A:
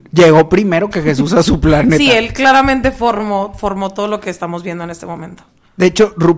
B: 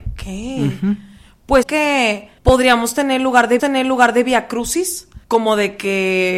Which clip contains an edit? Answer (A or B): B